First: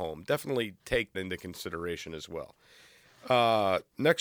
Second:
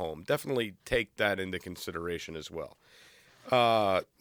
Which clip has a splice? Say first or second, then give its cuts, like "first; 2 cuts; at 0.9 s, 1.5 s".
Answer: first; 1 cut; at 1.1 s